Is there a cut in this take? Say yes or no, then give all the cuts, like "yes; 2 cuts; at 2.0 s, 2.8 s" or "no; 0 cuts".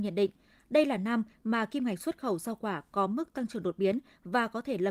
no; 0 cuts